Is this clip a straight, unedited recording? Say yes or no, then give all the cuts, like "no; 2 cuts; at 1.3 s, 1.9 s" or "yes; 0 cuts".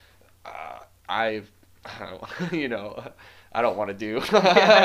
yes; 0 cuts